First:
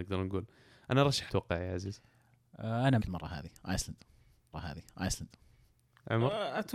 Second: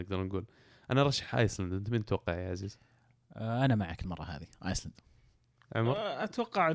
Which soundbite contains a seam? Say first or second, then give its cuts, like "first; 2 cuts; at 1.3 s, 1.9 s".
first; 3 cuts; at 1.3 s, 3.0 s, 4.5 s